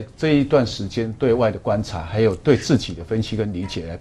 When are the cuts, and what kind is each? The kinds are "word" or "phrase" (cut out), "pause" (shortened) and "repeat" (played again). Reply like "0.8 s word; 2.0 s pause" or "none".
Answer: none